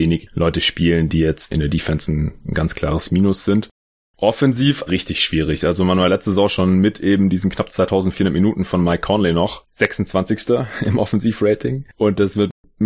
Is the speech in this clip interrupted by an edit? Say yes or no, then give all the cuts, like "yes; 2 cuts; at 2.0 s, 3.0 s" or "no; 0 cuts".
yes; 2 cuts; at 1.5 s, 4.9 s